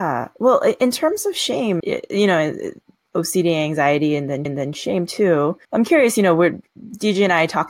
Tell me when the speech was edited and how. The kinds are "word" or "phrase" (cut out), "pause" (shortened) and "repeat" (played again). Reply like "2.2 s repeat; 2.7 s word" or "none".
1.8 s word; 4.5 s repeat; 5.6 s pause